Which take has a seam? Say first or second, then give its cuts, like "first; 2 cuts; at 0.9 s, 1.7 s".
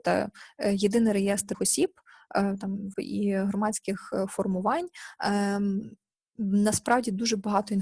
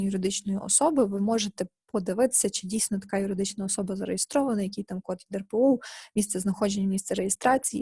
first; 2 cuts; at 1.5 s, 2.9 s